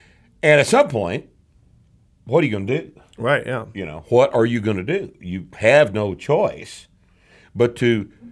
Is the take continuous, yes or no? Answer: yes